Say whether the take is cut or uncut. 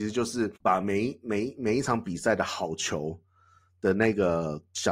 uncut